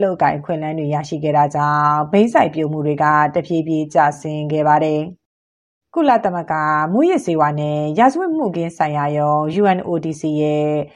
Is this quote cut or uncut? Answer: uncut